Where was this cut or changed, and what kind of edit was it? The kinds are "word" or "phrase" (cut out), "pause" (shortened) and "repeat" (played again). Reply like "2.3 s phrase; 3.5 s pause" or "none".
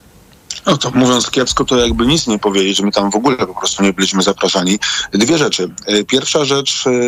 none